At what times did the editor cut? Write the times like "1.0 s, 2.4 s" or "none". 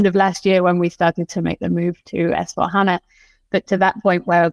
none